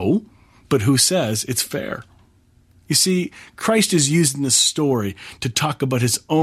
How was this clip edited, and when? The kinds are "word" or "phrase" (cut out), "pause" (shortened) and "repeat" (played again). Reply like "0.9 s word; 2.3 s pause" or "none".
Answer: none